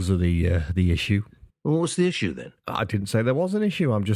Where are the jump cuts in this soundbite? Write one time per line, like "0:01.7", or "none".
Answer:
0:01.5
0:02.6